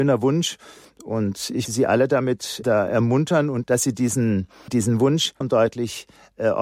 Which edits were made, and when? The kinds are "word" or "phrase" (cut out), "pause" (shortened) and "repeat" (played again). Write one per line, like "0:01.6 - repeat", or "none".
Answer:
0:01.7 - word
0:02.6 - word
0:03.6 - word
0:04.7 - word
0:05.4 - word